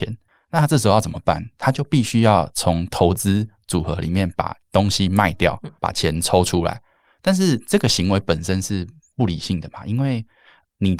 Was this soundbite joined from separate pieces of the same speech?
yes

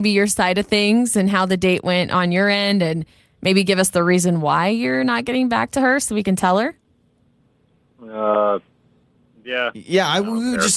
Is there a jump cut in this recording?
no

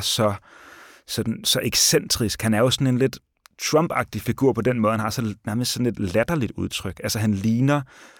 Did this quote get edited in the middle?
no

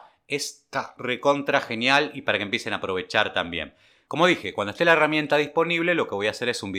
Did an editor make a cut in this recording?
no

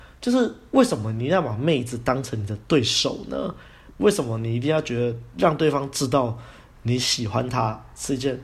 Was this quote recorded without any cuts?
yes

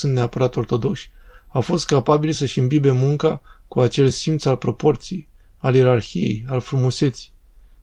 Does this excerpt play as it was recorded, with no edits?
yes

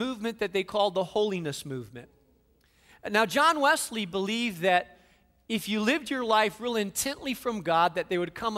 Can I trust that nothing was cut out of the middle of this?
yes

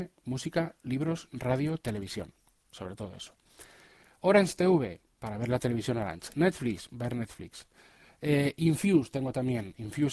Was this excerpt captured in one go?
yes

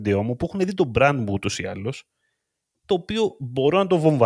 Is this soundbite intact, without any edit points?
yes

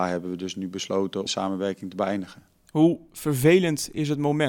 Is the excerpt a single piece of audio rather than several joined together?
no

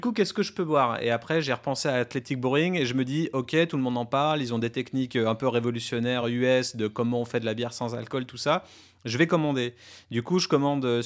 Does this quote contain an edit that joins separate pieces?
no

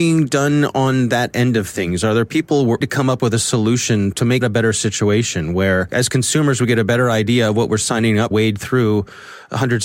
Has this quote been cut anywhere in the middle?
yes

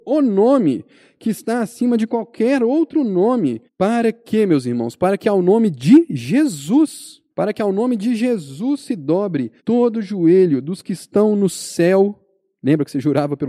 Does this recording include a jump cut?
yes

